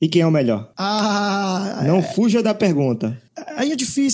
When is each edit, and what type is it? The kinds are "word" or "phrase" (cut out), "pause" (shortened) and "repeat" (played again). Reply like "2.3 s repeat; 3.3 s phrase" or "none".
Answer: none